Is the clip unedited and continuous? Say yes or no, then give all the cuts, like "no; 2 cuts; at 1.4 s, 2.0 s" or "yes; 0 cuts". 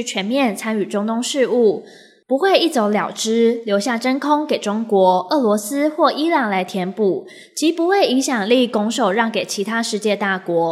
yes; 0 cuts